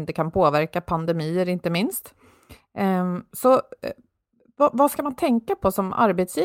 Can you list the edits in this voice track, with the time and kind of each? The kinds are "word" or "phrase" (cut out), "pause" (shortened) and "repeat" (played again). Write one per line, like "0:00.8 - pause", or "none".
none